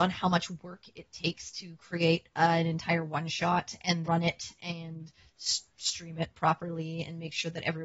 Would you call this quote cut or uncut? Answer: cut